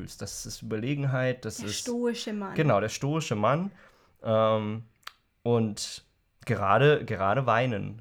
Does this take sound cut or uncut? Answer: uncut